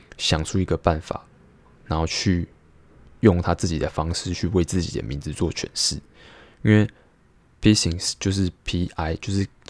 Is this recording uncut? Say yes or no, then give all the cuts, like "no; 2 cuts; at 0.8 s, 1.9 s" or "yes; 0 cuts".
yes; 0 cuts